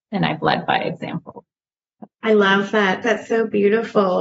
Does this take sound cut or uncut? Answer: uncut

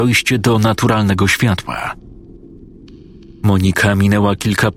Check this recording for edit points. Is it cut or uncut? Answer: uncut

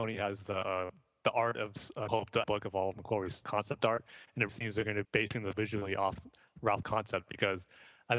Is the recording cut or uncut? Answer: cut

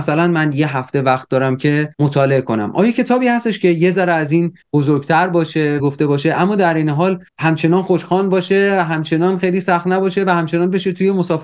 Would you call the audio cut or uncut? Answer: cut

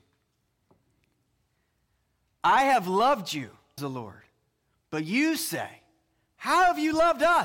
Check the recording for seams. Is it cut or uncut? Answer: cut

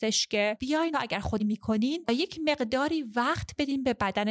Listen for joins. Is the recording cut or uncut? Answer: cut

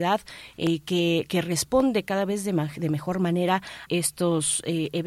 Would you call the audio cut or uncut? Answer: cut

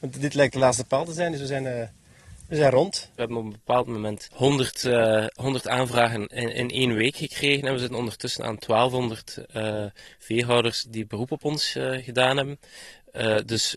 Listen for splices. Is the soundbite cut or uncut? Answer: cut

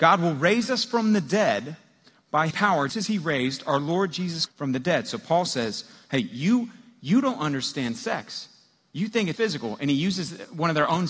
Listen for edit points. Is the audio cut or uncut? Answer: cut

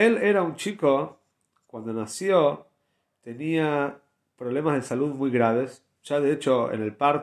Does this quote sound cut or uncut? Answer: uncut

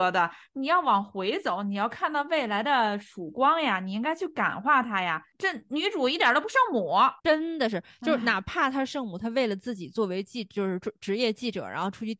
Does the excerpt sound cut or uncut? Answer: cut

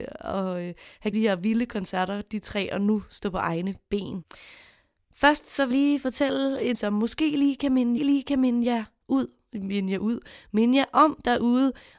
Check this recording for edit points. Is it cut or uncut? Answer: cut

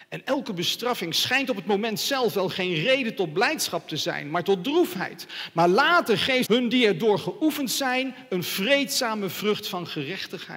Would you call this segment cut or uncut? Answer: cut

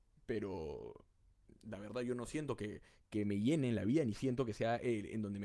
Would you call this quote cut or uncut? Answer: uncut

